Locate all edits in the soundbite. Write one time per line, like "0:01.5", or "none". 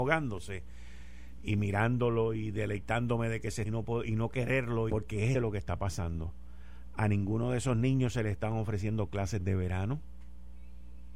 0:03.6
0:04.9
0:05.3